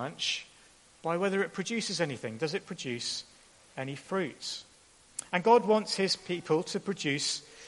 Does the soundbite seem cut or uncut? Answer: uncut